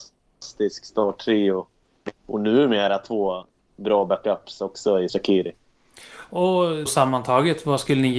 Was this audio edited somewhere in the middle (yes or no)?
yes